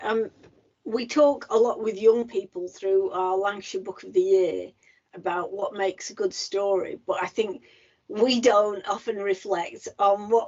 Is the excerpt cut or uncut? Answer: uncut